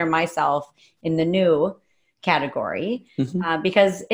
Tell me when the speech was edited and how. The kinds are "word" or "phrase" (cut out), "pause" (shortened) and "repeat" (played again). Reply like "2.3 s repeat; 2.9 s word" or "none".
none